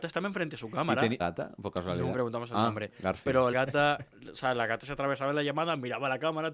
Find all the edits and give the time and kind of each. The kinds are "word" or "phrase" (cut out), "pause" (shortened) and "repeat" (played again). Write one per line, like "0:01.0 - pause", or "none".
0:01.2 - phrase
0:02.1 - word
0:03.5 - word

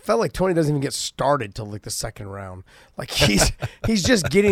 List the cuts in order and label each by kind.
none

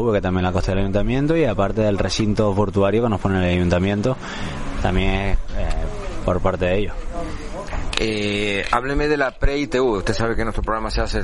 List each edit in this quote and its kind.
none

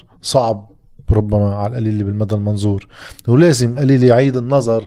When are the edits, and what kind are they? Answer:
0:03.8 - word

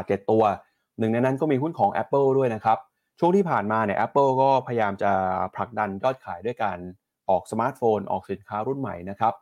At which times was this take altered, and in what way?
none

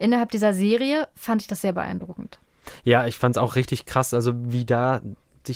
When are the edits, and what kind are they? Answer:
none

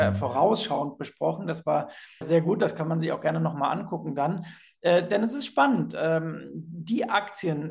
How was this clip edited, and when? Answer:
0:02.2 - word

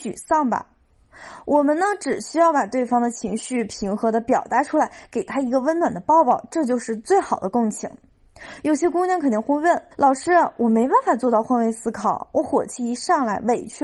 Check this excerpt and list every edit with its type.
0:09.9 - pause

